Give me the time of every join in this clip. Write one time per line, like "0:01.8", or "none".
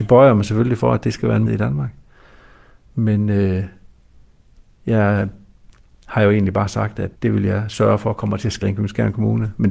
0:01.5
0:07.1
0:08.6